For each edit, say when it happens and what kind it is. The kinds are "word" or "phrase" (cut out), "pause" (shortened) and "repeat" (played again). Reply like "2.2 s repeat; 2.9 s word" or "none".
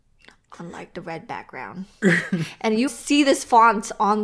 2.9 s word